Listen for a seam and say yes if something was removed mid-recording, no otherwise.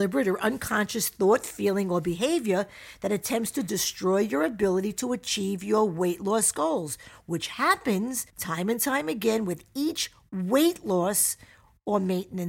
yes